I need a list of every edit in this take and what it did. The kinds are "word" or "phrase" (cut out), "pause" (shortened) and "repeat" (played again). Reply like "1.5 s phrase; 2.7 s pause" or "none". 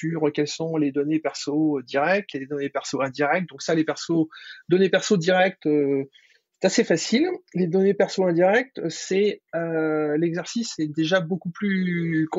none